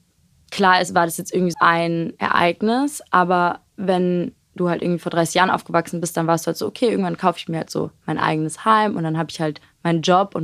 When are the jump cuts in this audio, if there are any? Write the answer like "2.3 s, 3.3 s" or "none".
1.5 s